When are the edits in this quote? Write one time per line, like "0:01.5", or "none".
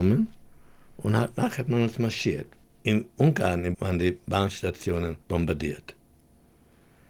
0:02.6
0:03.7
0:05.2